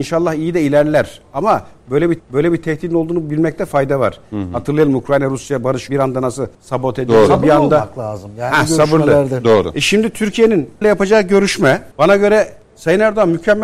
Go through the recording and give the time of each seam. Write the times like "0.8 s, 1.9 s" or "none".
2.2 s, 5.9 s, 6.5 s, 10.8 s, 11.9 s, 12.6 s

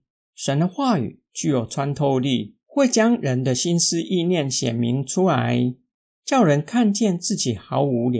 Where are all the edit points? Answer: 2.6 s

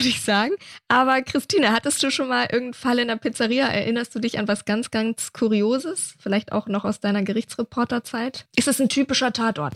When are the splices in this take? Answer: none

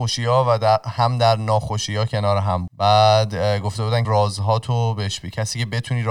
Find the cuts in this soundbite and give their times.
2.7 s, 4.0 s

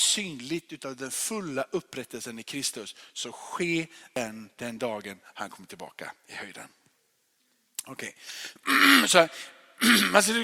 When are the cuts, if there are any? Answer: 4.5 s

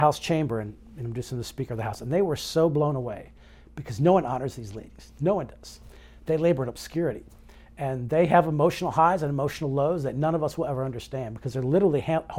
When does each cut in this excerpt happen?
none

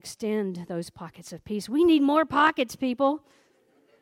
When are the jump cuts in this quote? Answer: none

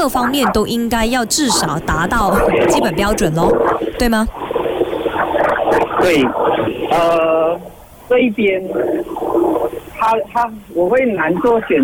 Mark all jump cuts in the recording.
none

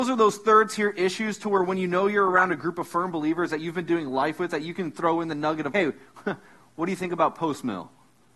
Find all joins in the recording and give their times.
5.7 s

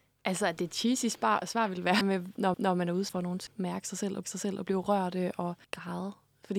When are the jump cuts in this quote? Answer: 2.0 s, 2.5 s, 3.1 s, 3.5 s, 4.2 s, 5.6 s

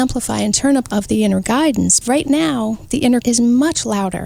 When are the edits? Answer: 0.9 s, 2.0 s, 3.2 s

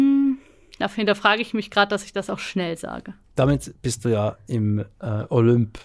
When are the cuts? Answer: 2.3 s, 3.2 s

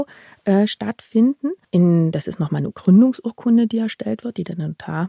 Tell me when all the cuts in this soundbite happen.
1.6 s, 2.7 s

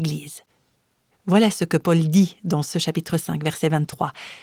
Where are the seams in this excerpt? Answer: none

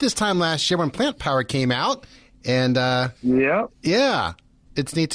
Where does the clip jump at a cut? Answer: 3.2 s

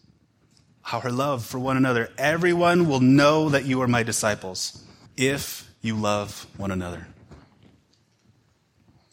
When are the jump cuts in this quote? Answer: 5.1 s

